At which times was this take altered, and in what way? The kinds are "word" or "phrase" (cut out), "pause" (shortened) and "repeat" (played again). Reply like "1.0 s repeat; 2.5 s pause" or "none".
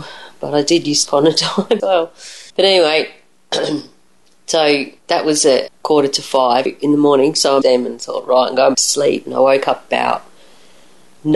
1.0 s phrase; 1.8 s word; 2.5 s pause; 5.0 s pause; 5.7 s word; 6.7 s word; 7.6 s word; 8.7 s word